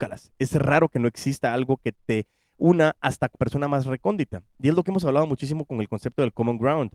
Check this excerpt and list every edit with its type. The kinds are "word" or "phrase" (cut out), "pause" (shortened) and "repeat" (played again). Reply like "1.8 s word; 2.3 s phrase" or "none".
3.3 s word